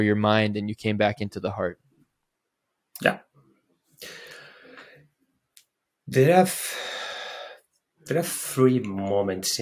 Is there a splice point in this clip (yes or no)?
no